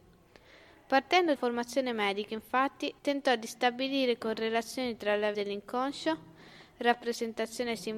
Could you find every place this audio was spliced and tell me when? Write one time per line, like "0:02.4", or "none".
0:01.4
0:03.0
0:05.3